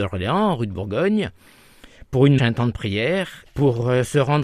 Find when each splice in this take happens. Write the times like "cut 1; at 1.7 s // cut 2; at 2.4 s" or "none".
cut 1; at 2.4 s